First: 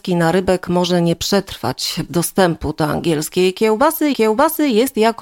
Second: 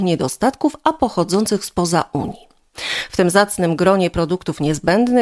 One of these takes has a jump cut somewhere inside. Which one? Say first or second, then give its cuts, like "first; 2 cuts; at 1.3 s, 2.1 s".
first; 2 cuts; at 2.1 s, 4.1 s